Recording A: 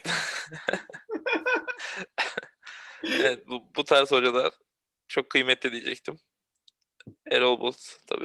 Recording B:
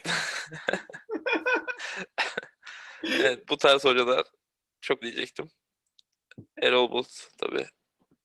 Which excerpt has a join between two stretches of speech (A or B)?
B